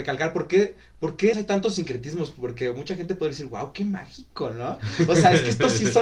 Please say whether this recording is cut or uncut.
cut